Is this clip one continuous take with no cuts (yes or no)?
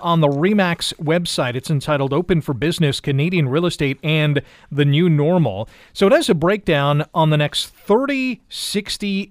yes